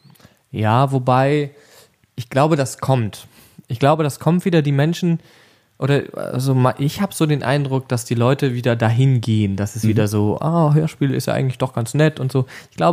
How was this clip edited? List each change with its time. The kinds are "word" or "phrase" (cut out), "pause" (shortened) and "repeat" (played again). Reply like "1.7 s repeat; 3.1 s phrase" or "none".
none